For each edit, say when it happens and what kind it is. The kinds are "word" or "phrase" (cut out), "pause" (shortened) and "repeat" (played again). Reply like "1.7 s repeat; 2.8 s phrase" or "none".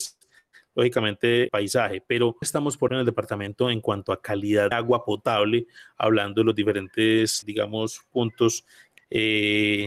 1.5 s word; 2.4 s word; 2.9 s word; 4.7 s word; 7.4 s word; 9.0 s word